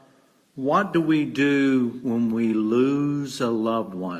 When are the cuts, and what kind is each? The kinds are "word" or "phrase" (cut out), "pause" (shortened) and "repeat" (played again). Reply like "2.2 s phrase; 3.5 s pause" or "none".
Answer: none